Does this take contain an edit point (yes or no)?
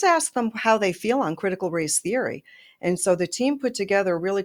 no